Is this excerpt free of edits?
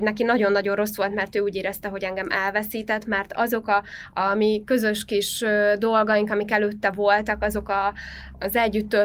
yes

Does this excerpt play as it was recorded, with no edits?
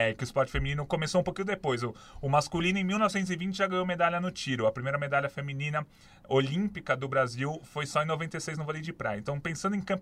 yes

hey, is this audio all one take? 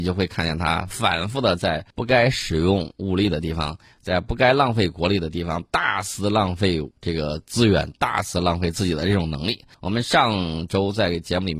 no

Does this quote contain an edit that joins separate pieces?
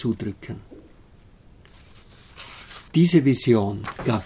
yes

